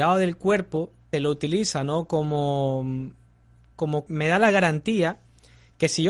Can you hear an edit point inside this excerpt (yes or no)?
yes